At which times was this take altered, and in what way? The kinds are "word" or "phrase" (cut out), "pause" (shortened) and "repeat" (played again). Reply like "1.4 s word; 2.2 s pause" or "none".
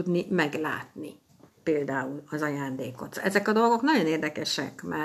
none